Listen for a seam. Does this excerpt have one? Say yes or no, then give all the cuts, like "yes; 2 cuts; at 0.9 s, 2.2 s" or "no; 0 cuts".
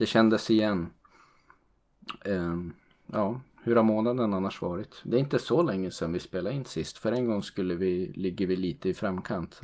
no; 0 cuts